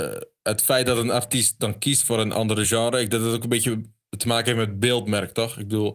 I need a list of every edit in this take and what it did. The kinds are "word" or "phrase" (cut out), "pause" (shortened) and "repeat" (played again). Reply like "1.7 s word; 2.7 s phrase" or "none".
none